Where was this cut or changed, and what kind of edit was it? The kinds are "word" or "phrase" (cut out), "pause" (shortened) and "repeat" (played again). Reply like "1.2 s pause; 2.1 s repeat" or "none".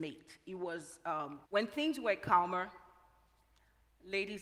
1.4 s pause